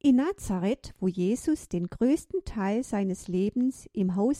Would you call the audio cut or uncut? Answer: uncut